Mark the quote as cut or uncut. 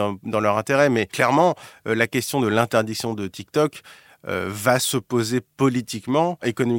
uncut